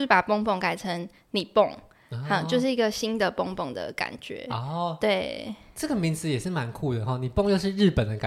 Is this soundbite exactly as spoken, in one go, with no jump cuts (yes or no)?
yes